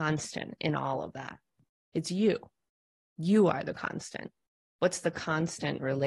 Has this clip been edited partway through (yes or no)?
no